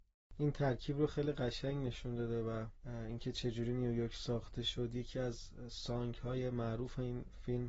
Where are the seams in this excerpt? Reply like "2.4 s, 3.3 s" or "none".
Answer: 2.8 s